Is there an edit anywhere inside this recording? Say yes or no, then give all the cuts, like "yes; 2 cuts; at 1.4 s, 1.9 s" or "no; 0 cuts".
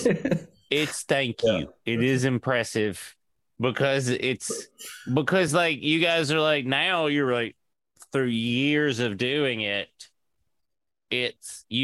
no; 0 cuts